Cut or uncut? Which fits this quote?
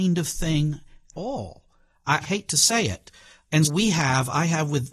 cut